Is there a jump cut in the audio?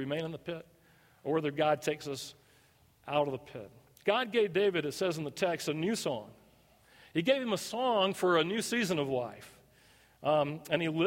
no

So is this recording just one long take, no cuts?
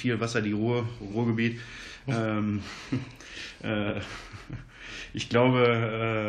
no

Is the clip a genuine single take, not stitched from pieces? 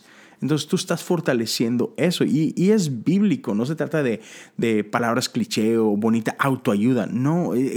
yes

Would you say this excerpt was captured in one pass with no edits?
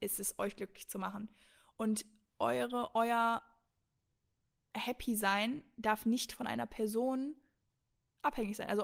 yes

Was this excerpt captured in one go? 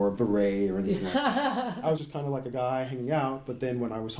no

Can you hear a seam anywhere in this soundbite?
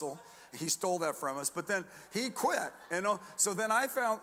no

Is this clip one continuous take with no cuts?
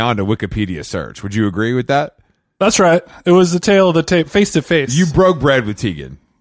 yes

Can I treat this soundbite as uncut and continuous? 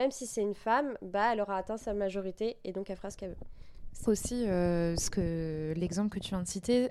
no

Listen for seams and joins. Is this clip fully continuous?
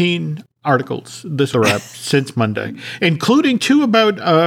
no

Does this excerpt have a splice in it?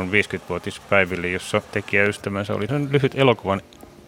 yes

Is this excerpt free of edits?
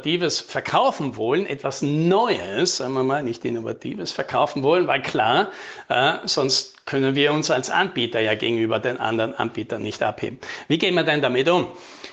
yes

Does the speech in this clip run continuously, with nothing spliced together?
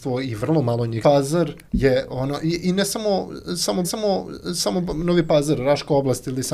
no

